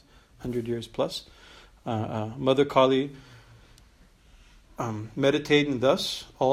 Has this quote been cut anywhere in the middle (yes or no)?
no